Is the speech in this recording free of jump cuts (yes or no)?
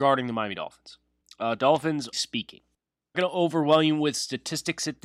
no